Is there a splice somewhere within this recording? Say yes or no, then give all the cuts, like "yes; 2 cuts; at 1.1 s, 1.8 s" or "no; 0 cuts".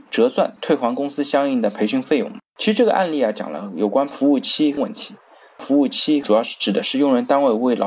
yes; 1 cut; at 2.5 s